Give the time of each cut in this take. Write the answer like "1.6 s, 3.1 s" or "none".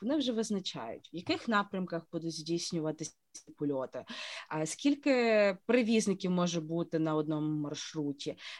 none